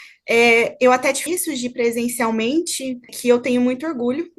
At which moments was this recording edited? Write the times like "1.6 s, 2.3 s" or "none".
1.3 s, 3.1 s